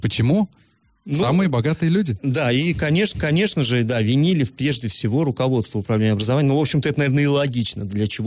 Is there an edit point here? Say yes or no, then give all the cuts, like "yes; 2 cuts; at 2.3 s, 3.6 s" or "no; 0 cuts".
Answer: yes; 1 cut; at 3.1 s